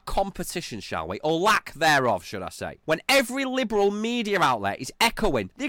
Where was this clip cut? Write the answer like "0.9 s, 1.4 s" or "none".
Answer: 2.8 s